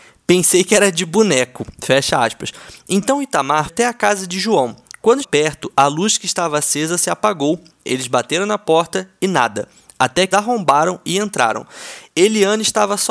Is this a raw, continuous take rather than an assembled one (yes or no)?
no